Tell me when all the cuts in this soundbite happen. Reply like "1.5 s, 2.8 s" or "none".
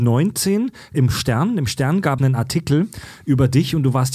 0.9 s, 2.2 s